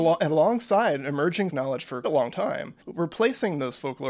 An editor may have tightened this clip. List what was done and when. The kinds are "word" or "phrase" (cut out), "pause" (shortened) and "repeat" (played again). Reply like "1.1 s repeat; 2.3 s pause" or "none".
1.5 s word; 2.0 s word; 2.8 s pause